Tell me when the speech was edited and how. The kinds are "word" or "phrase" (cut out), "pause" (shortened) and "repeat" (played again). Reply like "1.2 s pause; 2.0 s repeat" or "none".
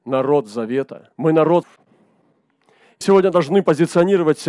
1.1 s pause; 1.6 s word; 3.0 s word